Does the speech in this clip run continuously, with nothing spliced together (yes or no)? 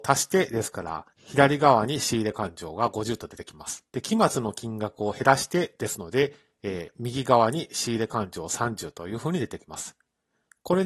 no